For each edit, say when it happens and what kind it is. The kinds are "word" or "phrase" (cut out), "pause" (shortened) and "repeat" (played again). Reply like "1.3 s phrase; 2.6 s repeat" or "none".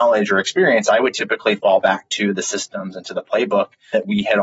none